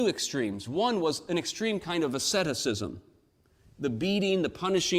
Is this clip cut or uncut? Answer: uncut